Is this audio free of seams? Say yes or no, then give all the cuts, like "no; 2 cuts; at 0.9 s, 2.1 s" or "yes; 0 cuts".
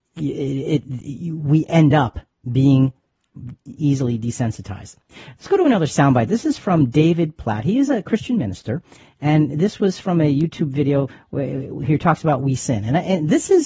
no; 2 cuts; at 3.7 s, 12.6 s